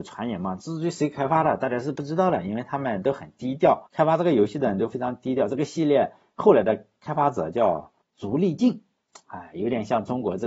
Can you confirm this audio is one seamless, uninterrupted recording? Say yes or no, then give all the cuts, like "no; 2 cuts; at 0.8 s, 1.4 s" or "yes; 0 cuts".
no; 2 cuts; at 3.9 s, 8.0 s